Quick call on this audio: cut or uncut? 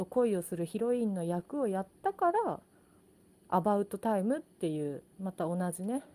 uncut